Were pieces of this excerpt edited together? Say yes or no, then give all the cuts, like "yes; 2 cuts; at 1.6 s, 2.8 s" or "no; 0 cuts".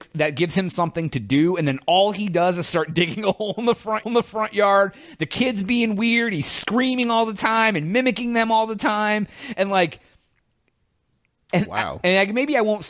yes; 1 cut; at 4.0 s